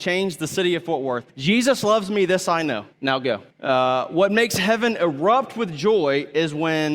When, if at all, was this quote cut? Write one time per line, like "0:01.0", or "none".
0:01.3
0:02.9
0:03.5